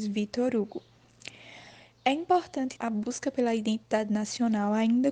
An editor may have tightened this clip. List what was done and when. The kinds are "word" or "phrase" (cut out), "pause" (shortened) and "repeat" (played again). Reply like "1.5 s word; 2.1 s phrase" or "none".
2.8 s phrase